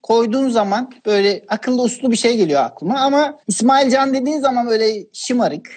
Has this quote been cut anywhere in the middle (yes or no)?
yes